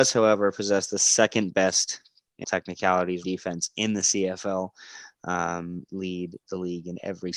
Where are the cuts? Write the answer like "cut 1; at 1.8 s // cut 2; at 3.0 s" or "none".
cut 1; at 2.4 s // cut 2; at 3.2 s // cut 3; at 5.9 s